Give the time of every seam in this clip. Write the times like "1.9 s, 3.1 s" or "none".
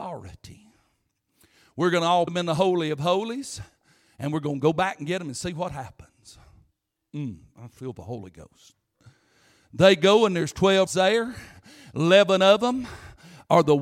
2.3 s, 10.9 s